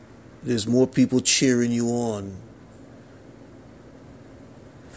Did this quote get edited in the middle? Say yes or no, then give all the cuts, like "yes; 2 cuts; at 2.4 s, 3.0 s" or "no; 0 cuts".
no; 0 cuts